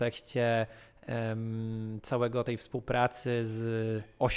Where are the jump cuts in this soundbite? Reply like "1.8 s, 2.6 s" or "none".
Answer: 2.4 s